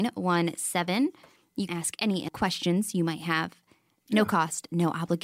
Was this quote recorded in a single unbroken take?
no; 2 cuts; at 1.7 s, 2.3 s

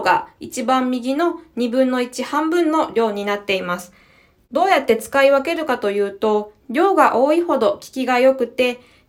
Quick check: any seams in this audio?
no; 0 cuts

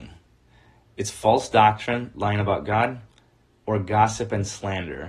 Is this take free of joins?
yes; 0 cuts

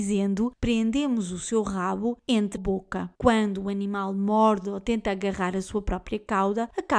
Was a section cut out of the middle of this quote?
yes; 2 cuts; at 2.6 s, 3.2 s

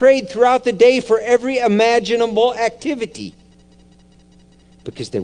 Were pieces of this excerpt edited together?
no; 0 cuts

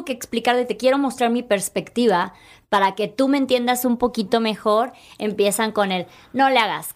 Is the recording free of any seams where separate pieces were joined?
yes; 0 cuts

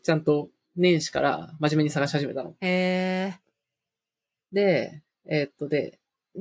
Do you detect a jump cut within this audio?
no; 0 cuts

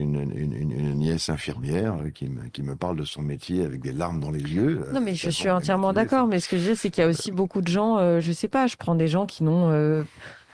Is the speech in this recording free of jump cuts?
yes; 0 cuts

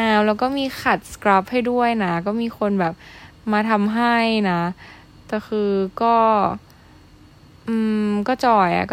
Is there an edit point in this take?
no; 0 cuts

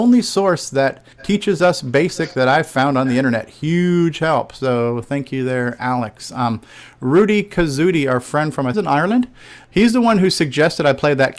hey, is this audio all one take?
no; 3 cuts; at 1.1 s, 8.7 s, 9.6 s

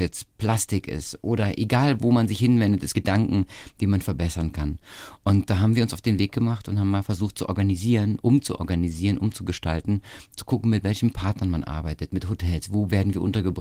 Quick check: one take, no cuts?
no; 1 cut; at 2.9 s

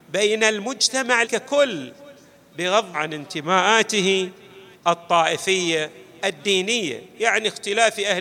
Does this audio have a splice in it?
yes; 3 cuts; at 1.2 s, 2.9 s, 6.2 s

